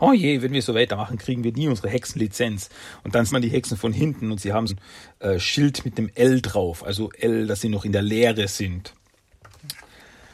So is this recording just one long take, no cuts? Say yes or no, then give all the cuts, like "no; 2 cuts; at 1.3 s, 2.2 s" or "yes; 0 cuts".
no; 2 cuts; at 3.3 s, 4.7 s